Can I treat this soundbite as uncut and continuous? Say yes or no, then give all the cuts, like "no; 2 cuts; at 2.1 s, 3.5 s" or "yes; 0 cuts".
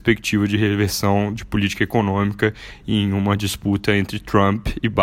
yes; 0 cuts